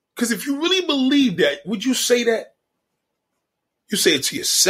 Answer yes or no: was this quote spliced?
no